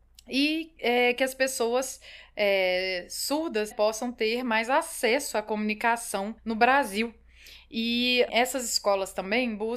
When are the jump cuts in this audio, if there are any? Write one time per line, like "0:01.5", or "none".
0:03.7
0:06.4
0:08.3